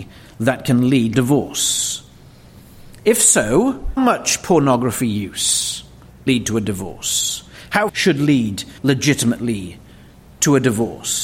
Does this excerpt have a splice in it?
yes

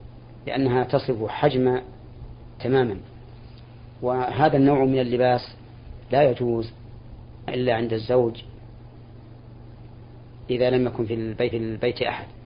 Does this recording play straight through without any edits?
no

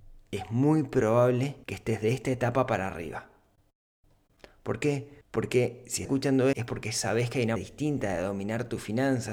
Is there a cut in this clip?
yes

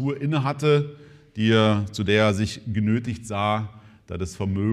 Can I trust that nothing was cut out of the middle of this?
yes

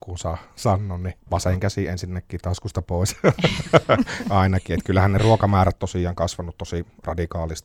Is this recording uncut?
no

